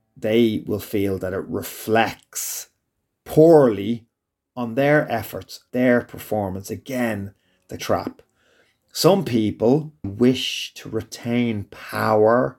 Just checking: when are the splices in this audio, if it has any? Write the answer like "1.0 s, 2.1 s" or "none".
5.7 s, 7.8 s, 10.0 s